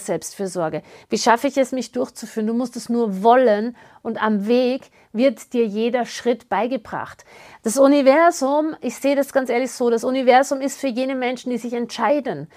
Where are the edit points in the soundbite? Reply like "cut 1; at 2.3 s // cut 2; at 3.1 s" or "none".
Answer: none

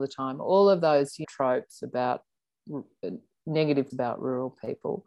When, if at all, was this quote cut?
cut 1; at 1.2 s // cut 2; at 3.9 s

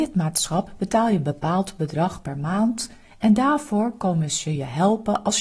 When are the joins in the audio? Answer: none

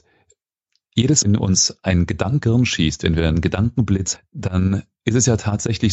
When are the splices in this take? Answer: cut 1; at 1.2 s // cut 2; at 2.4 s // cut 3; at 4.1 s

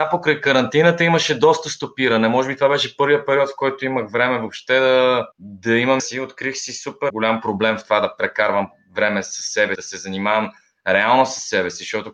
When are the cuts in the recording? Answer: cut 1; at 5.3 s // cut 2; at 6.0 s // cut 3; at 7.1 s // cut 4; at 9.8 s

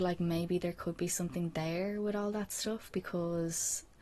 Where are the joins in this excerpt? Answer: none

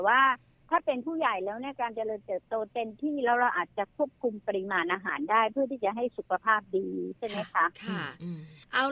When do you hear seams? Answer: cut 1; at 7.7 s

